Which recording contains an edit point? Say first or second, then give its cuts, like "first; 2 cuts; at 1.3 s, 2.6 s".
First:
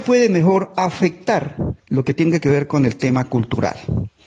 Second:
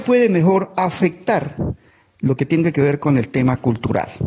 first; 1 cut; at 1.8 s